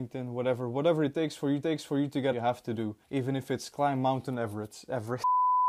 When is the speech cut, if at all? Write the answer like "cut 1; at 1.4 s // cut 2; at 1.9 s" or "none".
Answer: cut 1; at 1.6 s // cut 2; at 2.3 s // cut 3; at 3.0 s